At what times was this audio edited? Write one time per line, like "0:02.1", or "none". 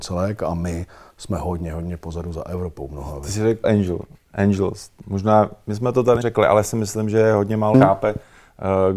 0:03.6
0:06.2
0:06.6
0:07.7